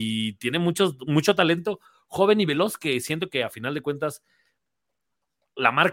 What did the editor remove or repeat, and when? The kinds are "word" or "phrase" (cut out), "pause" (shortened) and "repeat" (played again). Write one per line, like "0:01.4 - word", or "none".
none

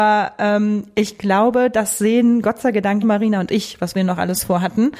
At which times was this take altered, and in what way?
0:03.0 - word

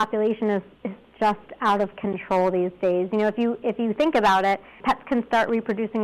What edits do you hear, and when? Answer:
none

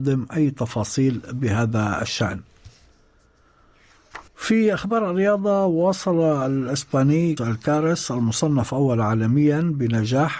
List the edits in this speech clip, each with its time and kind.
0:04.3 - pause
0:07.4 - word

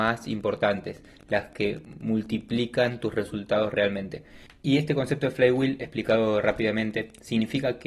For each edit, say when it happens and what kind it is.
none

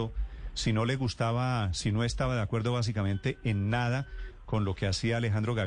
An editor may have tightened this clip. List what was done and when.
none

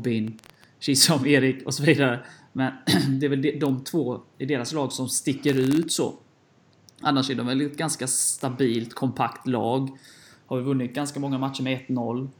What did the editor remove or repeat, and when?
none

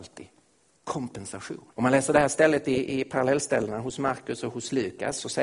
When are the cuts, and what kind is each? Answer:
0:01.7 - pause

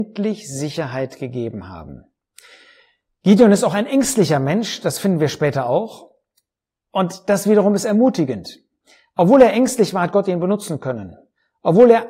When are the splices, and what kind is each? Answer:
none

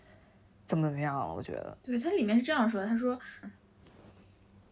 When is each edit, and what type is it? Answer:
0:01.8 - pause
0:03.4 - word

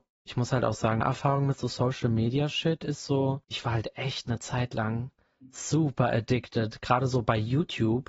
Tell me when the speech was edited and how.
0:01.0 - word
0:03.4 - pause

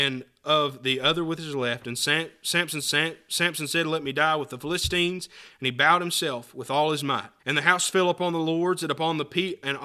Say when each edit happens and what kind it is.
0:02.8 - repeat
0:07.4 - pause

